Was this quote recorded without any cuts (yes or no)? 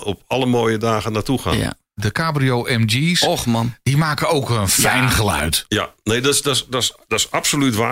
yes